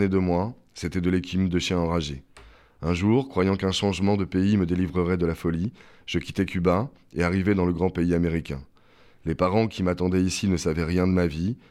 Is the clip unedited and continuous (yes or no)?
yes